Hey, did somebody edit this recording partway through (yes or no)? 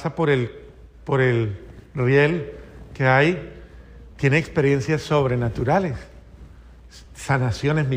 no